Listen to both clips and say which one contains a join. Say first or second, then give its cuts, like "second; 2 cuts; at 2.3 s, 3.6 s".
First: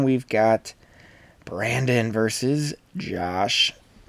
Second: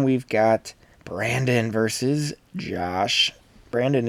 second; 1 cut; at 0.9 s